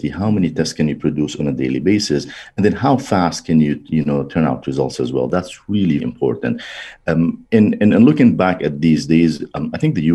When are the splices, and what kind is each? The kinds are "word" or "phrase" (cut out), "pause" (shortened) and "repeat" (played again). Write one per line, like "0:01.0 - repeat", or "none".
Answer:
0:06.0 - word